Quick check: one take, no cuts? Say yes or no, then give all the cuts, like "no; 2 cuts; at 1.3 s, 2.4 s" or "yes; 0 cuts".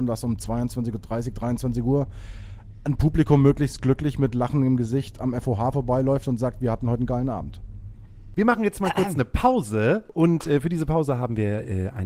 yes; 0 cuts